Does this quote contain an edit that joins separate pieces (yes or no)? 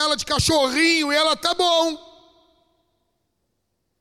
no